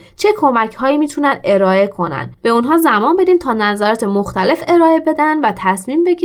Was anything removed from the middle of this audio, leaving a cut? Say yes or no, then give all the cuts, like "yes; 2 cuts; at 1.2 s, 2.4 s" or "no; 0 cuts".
yes; 1 cut; at 2.4 s